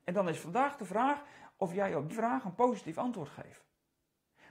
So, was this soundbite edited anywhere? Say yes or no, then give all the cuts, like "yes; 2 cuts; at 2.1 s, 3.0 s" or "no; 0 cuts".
yes; 1 cut; at 2.1 s